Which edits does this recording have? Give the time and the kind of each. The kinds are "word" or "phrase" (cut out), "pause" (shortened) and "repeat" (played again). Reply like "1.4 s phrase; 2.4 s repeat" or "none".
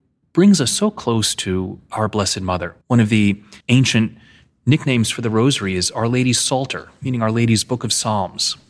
2.8 s pause; 3.6 s pause